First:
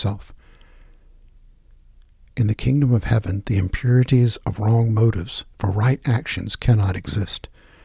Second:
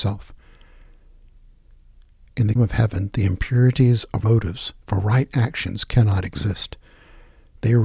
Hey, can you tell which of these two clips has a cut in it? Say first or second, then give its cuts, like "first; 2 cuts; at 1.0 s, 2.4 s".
second; 2 cuts; at 2.6 s, 4.2 s